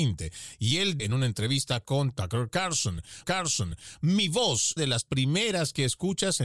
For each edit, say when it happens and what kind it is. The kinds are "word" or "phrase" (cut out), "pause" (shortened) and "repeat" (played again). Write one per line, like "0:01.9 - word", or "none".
0:01.0 - word
0:03.2 - repeat
0:04.8 - phrase